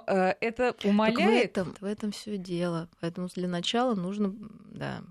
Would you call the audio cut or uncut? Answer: cut